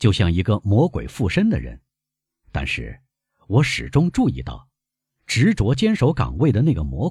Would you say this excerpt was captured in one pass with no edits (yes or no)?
yes